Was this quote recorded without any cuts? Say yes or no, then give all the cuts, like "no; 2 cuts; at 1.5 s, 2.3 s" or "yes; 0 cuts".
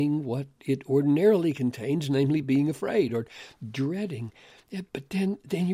yes; 0 cuts